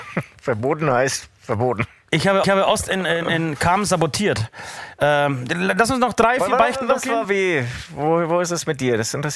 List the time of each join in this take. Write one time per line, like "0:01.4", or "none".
0:02.4
0:07.2